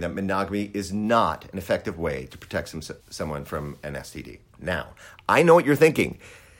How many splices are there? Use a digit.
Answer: 2